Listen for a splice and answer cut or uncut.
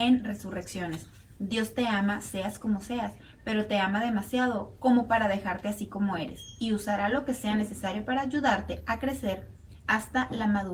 uncut